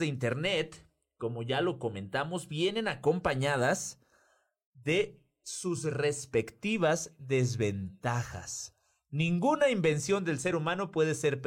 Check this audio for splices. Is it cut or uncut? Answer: uncut